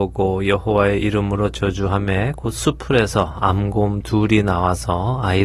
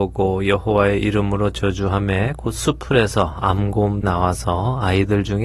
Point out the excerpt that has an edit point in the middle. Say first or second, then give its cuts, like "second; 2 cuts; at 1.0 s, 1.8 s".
second; 1 cut; at 4.0 s